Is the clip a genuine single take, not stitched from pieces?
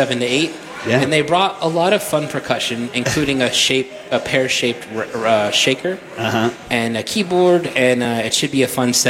yes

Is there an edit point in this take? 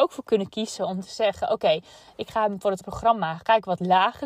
yes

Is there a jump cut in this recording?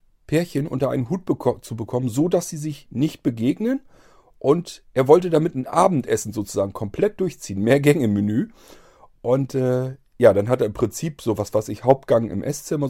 no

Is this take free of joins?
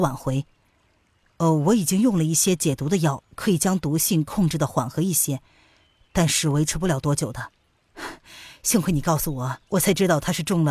no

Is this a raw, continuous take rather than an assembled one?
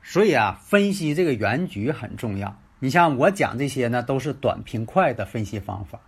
no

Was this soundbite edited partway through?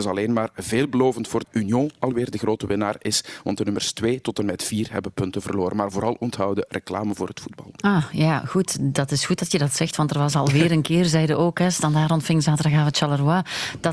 yes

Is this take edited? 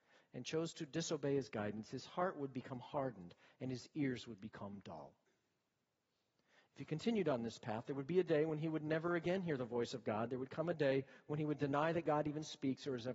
no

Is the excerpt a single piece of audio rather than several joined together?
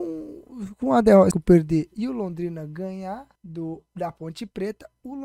no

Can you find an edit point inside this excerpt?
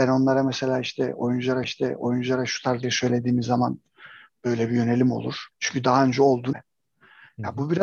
yes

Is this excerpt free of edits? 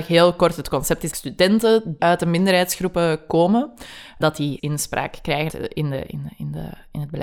no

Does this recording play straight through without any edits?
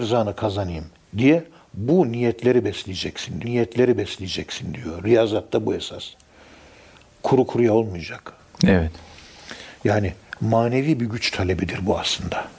no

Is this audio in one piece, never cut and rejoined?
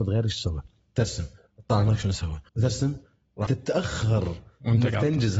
no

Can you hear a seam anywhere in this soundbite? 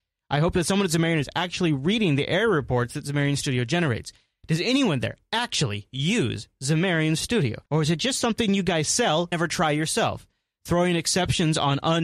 yes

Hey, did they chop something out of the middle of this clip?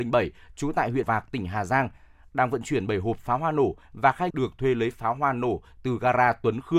yes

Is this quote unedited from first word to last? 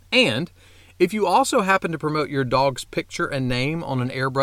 yes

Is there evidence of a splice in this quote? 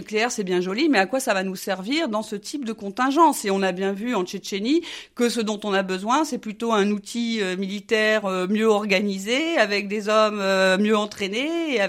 no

